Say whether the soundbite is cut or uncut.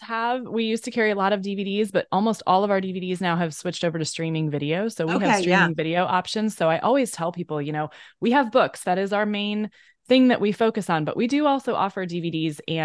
uncut